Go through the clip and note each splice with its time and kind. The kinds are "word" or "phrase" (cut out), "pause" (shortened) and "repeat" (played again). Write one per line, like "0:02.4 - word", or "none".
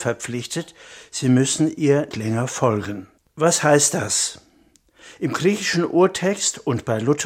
0:02.1 - word
0:03.2 - pause

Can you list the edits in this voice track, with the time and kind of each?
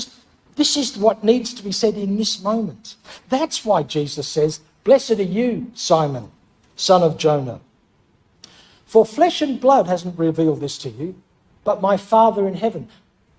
none

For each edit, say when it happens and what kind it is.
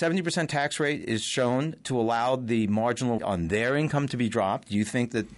0:03.2 - word

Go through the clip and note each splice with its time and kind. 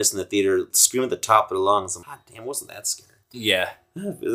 0:02.0 - word

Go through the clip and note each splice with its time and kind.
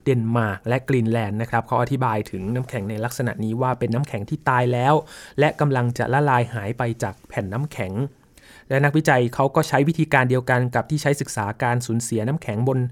none

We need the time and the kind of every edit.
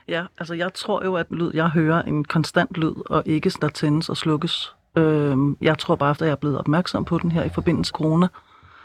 0:01.3 - word
0:02.1 - word
0:03.6 - word
0:06.2 - word
0:07.9 - word

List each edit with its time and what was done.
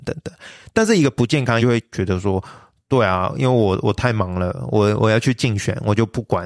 0:01.6 - word

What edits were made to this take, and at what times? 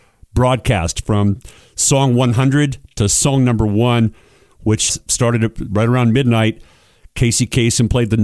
0:04.9 - word

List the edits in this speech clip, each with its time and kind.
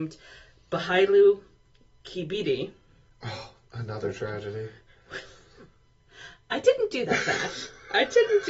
none

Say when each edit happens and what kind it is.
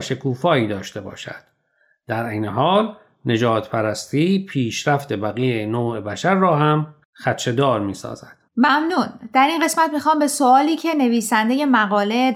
none

